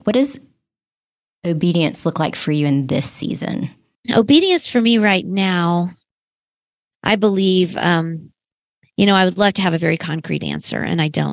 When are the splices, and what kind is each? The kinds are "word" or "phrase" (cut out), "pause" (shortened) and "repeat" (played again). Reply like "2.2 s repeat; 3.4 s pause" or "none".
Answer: none